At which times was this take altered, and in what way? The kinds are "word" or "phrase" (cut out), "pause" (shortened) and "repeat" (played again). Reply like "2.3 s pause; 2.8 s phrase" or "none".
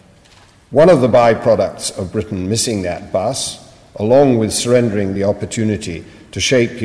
none